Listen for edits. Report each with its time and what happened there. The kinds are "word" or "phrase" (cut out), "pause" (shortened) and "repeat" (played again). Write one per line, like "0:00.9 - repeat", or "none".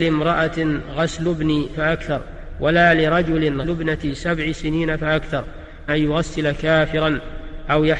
0:01.7 - phrase
0:03.6 - word
0:05.9 - phrase